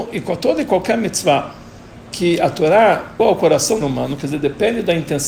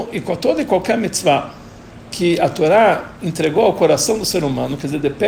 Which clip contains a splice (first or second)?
first